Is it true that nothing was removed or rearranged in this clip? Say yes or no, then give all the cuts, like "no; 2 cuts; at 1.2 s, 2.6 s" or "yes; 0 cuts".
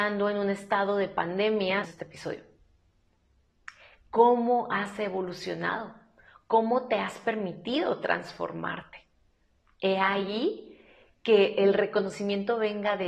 no; 1 cut; at 1.8 s